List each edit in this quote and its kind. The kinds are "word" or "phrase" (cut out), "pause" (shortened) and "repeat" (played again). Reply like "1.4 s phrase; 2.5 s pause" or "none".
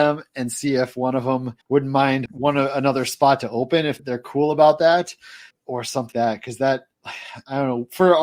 1.6 s pause; 2.3 s phrase; 4.0 s word; 5.5 s word; 6.1 s word